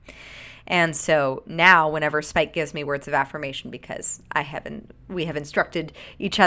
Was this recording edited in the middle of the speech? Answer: no; 0 cuts

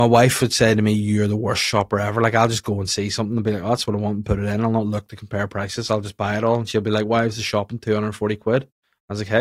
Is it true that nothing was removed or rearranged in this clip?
yes; 0 cuts

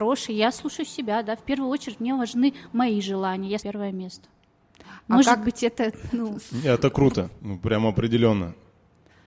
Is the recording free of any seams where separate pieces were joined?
no; 2 cuts; at 3.6 s, 7.4 s

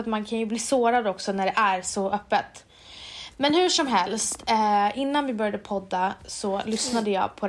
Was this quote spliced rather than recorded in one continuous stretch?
no; 0 cuts

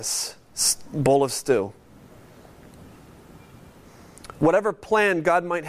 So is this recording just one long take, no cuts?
yes; 0 cuts

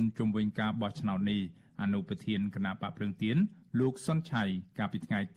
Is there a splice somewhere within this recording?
no; 0 cuts

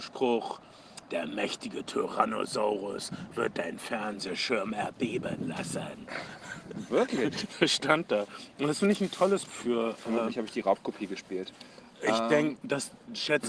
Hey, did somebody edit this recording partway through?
yes; 1 cut; at 9.5 s

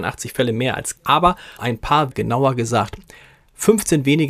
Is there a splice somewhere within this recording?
yes; 3 cuts; at 1.0 s, 1.6 s, 2.1 s

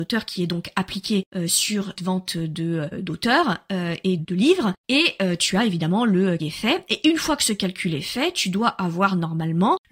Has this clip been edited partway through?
yes; 4 cuts; at 2.0 s, 2.9 s, 4.2 s, 6.4 s

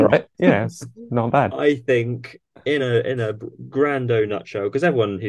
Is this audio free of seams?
yes; 0 cuts

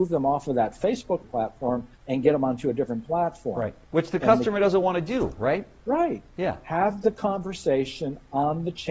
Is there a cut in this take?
yes; 2 cuts; at 1.2 s, 2.0 s

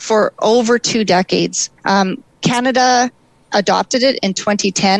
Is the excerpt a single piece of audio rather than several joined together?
no; 1 cut; at 1.8 s

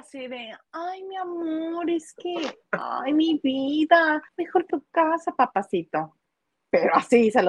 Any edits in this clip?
yes; 2 cuts; at 4.3 s, 4.7 s

